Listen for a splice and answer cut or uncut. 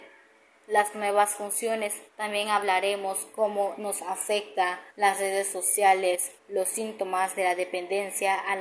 cut